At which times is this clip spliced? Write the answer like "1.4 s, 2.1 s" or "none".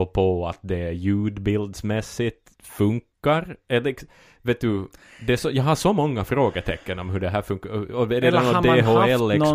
2.5 s

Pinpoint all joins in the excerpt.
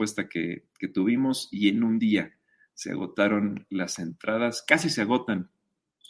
none

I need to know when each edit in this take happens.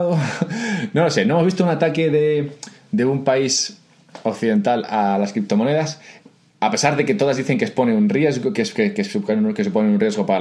none

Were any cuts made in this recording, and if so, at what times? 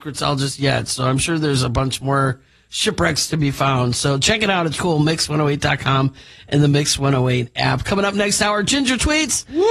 4.8 s

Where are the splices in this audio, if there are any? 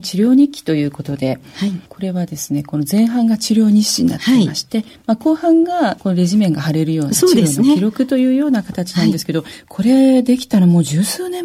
none

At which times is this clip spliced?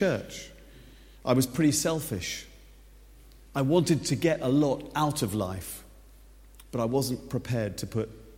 none

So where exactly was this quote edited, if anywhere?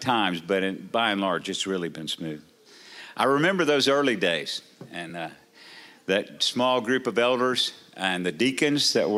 none

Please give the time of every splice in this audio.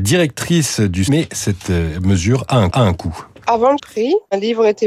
1.1 s, 2.7 s, 3.8 s

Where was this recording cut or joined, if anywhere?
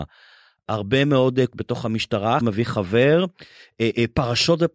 1.5 s, 2.4 s

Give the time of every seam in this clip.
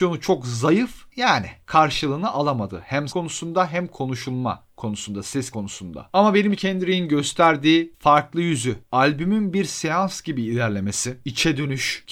3.1 s, 5.5 s, 6.5 s

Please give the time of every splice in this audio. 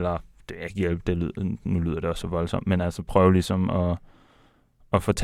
none

